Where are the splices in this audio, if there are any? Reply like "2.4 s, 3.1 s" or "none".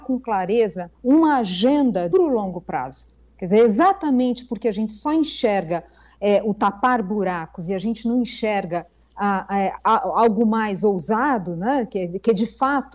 0.9 s, 2.1 s